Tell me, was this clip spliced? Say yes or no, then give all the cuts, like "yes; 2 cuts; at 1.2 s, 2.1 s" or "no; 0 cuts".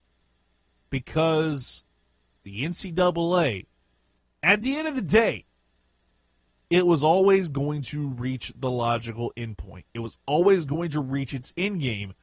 no; 0 cuts